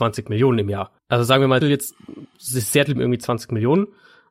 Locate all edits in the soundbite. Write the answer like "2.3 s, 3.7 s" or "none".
1.0 s, 1.6 s, 3.0 s